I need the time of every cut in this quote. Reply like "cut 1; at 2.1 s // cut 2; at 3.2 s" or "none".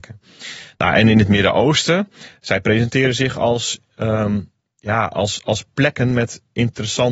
none